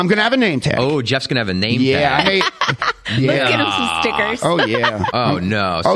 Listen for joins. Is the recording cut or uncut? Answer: uncut